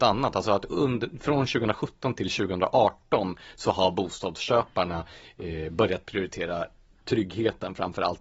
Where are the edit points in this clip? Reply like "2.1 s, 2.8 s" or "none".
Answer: none